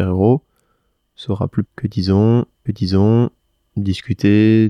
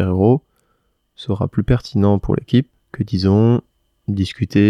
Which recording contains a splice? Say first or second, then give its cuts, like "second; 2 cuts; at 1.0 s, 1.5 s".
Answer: first; 2 cuts; at 1.6 s, 2.7 s